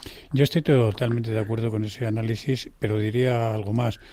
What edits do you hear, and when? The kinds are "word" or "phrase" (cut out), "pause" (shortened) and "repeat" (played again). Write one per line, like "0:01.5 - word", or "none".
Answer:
none